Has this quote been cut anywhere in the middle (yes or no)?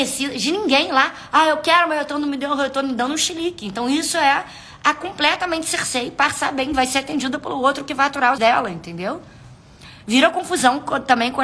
yes